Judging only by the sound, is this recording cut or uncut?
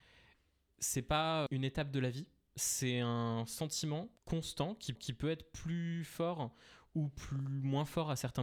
cut